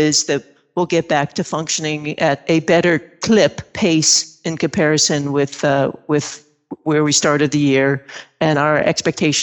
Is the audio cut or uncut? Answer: uncut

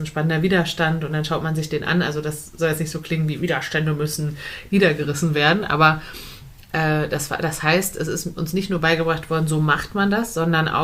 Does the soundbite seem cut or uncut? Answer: uncut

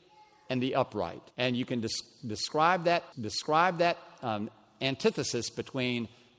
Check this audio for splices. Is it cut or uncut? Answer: cut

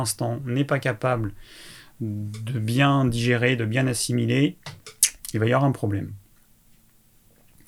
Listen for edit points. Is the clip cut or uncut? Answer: uncut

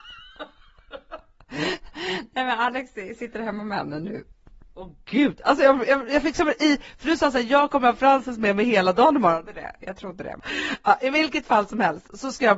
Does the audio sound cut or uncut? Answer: uncut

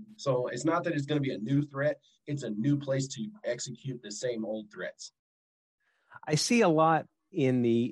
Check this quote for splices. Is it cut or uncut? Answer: uncut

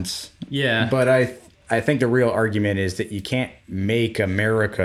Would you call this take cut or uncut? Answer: uncut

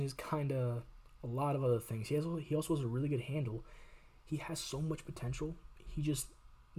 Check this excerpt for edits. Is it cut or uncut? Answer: uncut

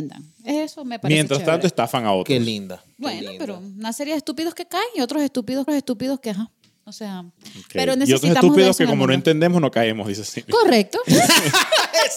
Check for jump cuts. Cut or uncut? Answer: cut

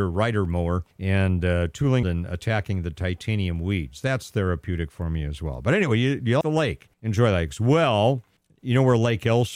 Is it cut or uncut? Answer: cut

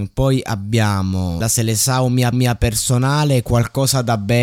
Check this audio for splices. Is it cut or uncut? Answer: cut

